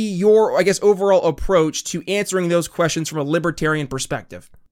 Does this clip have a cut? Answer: no; 0 cuts

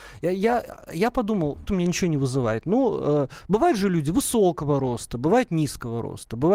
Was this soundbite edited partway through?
yes; 1 cut; at 1.7 s

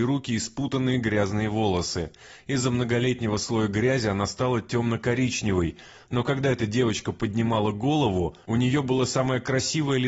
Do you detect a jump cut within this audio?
no; 0 cuts

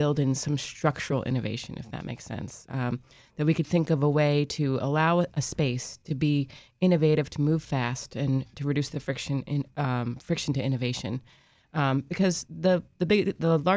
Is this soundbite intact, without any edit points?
yes; 0 cuts

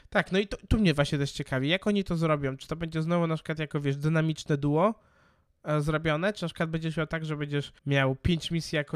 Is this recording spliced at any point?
yes; 1 cut; at 7.8 s

